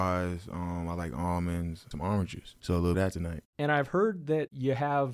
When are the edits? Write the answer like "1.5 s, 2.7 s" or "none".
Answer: 1.9 s, 2.9 s